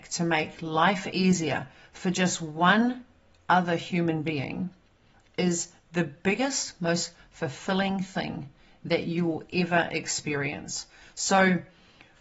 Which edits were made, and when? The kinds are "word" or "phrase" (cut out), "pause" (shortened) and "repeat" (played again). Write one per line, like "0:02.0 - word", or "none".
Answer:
none